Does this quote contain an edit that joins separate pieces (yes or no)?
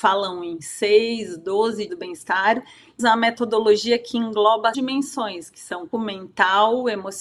yes